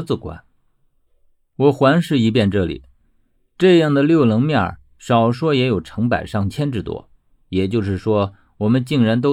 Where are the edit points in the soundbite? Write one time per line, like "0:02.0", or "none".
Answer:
none